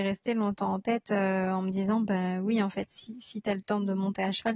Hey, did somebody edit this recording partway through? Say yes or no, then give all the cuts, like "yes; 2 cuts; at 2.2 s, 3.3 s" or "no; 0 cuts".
no; 0 cuts